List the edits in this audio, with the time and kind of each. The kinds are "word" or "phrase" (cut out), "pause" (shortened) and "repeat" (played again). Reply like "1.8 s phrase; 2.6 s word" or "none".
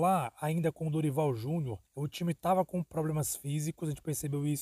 1.9 s pause